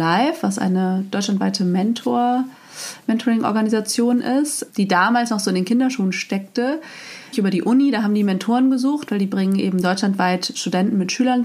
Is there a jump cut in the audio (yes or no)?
yes